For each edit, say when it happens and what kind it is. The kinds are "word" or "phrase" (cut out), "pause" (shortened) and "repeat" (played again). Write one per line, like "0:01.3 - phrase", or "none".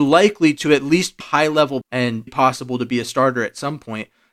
0:01.2 - word
0:01.8 - word
0:02.3 - word